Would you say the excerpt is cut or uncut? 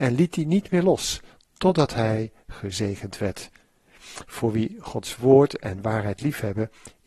uncut